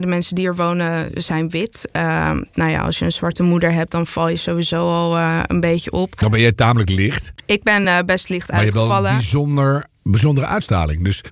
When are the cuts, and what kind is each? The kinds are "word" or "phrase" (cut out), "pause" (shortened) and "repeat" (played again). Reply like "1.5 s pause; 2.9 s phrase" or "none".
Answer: none

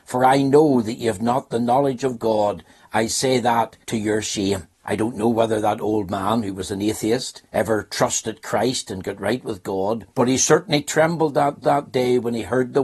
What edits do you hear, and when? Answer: 3.8 s pause; 4.7 s pause; 7.5 s pause; 10.1 s pause; 11.6 s repeat

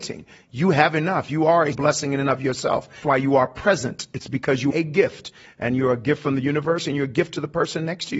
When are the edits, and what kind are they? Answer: 1.7 s word; 3.0 s word; 4.7 s word

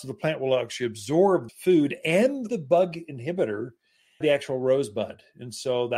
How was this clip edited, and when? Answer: 1.5 s word; 2.5 s word; 4.2 s word

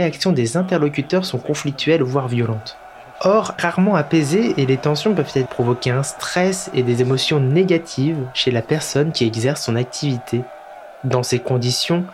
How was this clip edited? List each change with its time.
3.6 s phrase; 5.5 s word

